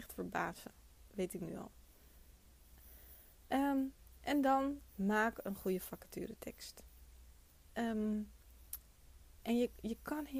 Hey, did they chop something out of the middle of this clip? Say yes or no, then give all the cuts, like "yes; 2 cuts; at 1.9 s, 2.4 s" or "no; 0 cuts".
no; 0 cuts